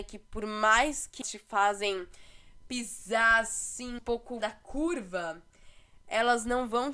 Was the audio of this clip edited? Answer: yes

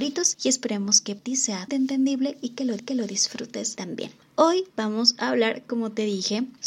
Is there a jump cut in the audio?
yes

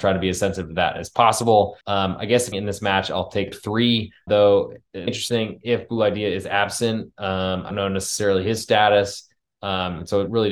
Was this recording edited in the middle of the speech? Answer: yes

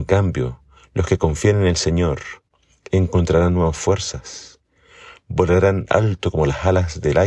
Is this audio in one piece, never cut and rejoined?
yes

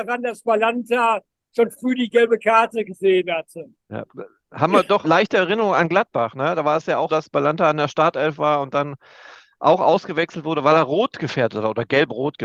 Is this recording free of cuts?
no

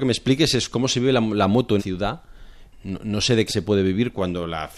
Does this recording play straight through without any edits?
no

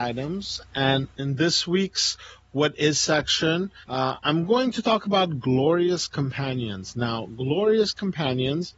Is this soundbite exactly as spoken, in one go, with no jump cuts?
no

